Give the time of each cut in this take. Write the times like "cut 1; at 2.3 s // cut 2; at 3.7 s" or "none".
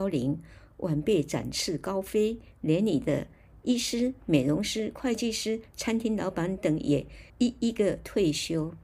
cut 1; at 7.3 s